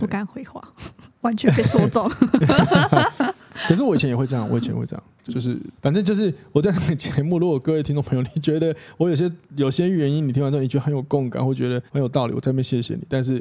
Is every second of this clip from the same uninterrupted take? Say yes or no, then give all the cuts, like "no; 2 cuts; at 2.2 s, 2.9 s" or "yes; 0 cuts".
no; 4 cuts; at 5.3 s, 5.8 s, 9.4 s, 11.9 s